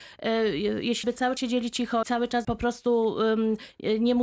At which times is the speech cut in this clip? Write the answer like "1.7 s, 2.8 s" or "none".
1.0 s, 1.4 s, 2.0 s, 2.4 s

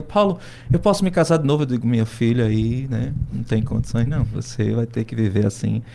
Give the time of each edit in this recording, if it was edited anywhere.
none

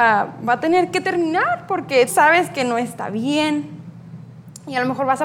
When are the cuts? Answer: 2.1 s

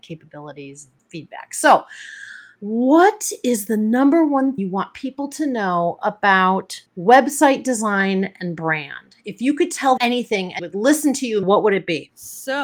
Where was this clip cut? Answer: 2.5 s, 4.6 s, 6.9 s, 10.0 s, 10.6 s, 11.4 s

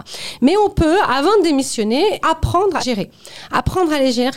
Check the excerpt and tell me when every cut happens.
2.2 s, 2.8 s

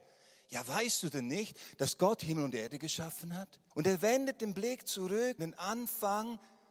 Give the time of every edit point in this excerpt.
3.7 s, 5.4 s

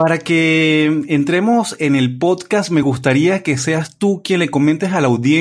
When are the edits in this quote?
none

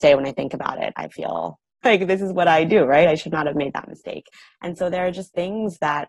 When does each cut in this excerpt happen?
1.8 s

